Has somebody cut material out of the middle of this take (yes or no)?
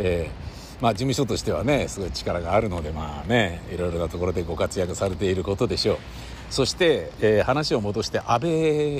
no